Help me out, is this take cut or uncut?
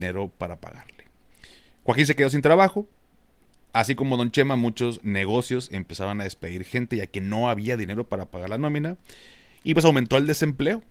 uncut